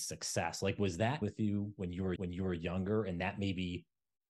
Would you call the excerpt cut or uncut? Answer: cut